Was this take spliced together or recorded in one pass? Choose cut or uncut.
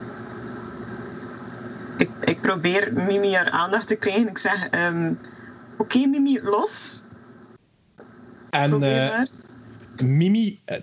uncut